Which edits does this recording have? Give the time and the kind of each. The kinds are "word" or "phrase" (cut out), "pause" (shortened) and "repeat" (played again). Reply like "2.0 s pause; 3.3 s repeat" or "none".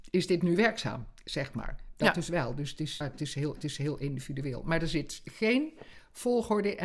3.0 s word; 3.6 s repeat

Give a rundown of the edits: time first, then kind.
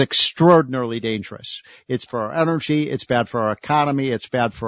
2.1 s word

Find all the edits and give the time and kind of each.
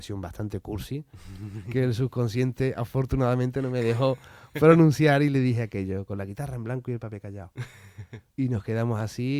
8.3 s pause

